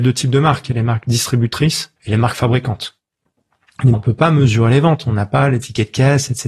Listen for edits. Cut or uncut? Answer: cut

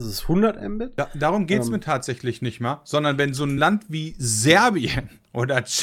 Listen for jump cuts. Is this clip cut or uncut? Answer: uncut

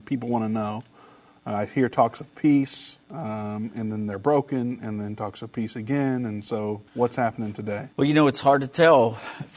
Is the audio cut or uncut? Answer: cut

